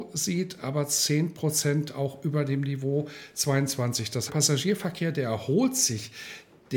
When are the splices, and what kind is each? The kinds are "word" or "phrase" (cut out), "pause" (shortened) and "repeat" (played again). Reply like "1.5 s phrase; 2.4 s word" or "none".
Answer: 4.3 s phrase